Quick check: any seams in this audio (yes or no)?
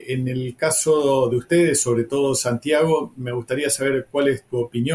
no